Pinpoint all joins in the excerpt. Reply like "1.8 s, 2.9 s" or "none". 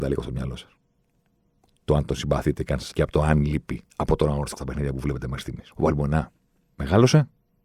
2.9 s, 3.9 s, 4.6 s, 5.7 s